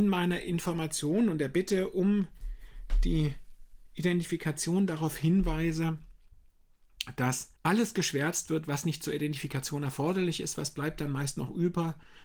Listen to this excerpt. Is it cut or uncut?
cut